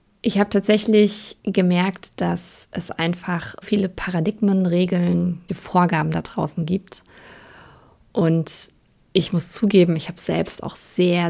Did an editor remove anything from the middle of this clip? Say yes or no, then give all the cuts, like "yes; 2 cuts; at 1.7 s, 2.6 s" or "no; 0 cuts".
yes; 3 cuts; at 1.4 s, 3.6 s, 5.5 s